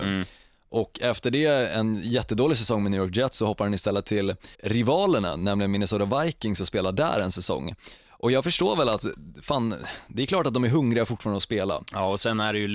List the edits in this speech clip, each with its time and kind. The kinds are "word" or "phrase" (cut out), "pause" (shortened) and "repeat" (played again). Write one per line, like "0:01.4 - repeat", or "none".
0:04.5 - pause